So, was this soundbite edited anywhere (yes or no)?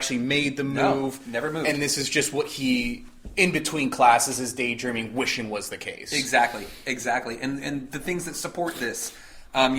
no